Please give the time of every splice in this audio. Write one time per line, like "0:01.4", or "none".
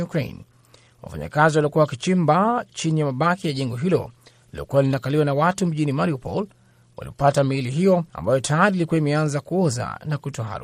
0:08.1

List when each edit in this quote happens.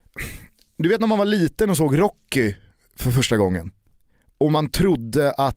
none

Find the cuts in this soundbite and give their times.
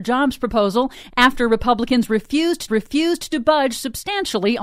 0:02.7

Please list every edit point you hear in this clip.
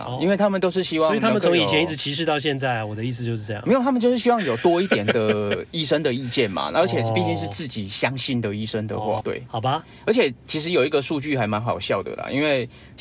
0:09.2

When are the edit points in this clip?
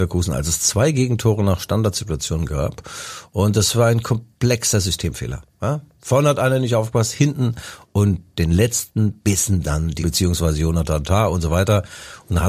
0:10.0

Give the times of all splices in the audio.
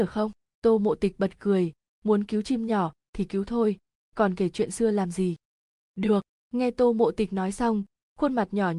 none

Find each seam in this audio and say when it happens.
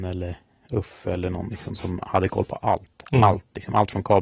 none

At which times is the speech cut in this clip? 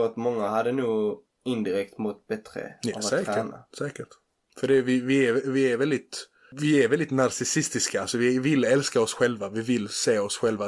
none

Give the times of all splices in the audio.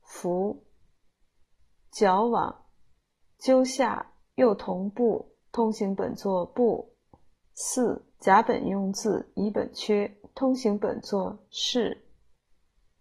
0:05.4
0:08.1

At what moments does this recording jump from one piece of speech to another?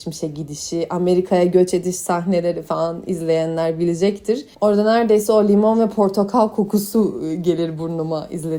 0:04.5

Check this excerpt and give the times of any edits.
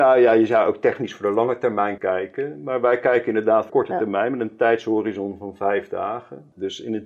0:02.0
0:03.7

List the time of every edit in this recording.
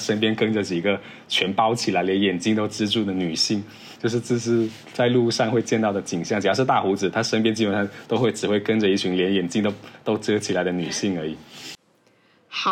0:04.8

